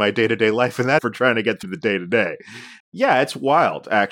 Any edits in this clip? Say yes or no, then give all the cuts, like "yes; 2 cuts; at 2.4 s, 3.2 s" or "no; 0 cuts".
yes; 3 cuts; at 1.0 s, 1.6 s, 2.8 s